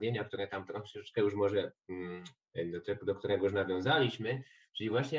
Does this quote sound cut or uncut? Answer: uncut